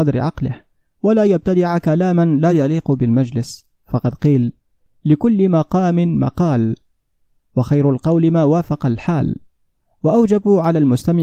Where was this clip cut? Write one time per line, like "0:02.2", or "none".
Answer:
none